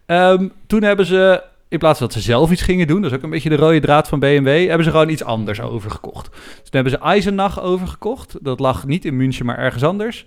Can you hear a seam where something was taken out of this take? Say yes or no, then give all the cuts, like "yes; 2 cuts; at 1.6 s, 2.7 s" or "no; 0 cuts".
no; 0 cuts